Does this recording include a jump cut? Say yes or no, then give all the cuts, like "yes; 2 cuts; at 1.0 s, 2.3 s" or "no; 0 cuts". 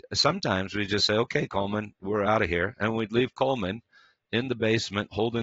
no; 0 cuts